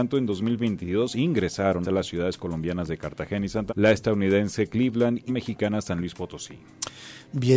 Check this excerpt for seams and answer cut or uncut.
cut